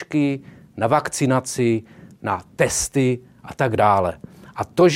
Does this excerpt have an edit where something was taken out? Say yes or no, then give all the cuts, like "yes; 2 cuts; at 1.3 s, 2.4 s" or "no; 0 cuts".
no; 0 cuts